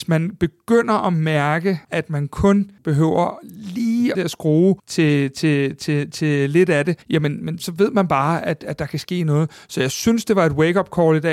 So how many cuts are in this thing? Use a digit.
6